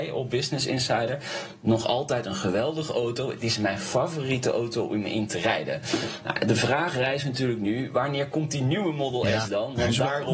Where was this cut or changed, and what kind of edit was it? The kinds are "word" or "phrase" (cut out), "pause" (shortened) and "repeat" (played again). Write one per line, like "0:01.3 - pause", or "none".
none